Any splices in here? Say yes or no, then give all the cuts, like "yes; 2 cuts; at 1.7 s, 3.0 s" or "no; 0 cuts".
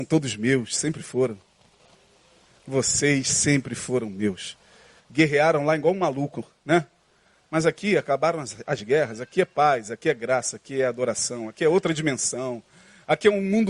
no; 0 cuts